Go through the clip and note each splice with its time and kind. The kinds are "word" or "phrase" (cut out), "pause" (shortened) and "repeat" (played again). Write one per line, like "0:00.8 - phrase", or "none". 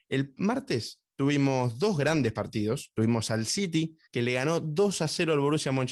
0:04.1 - pause